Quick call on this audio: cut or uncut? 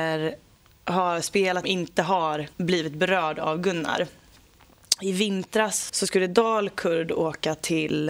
cut